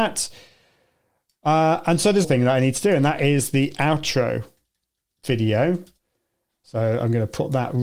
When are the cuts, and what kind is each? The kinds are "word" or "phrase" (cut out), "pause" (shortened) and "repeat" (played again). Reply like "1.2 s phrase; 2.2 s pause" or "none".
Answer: 2.2 s phrase

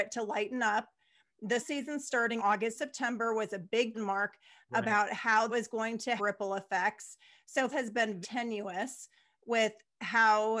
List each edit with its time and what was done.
1.6 s word; 2.4 s word; 2.7 s word; 3.9 s word; 5.5 s word; 6.2 s word; 7.7 s word; 8.2 s word

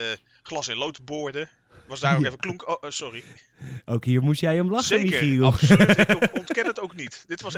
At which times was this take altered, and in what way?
none

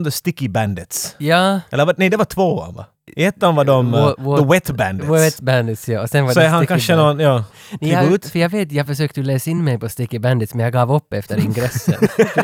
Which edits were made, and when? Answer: none

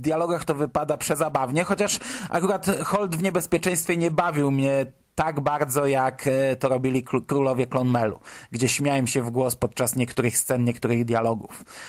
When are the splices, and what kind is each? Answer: none

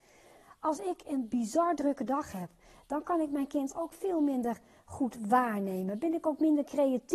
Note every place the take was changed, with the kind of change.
none

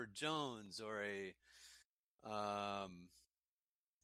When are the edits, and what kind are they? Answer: none

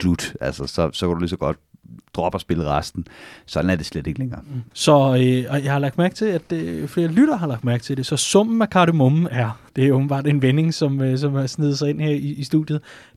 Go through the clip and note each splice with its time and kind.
4.7 s pause; 9.7 s pause

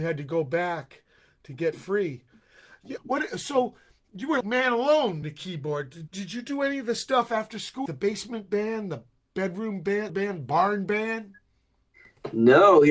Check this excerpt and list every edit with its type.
3.0 s word; 4.4 s word; 5.2 s word; 6.1 s word; 7.9 s word; 10.1 s word

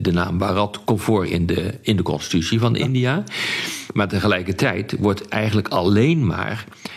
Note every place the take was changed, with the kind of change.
none

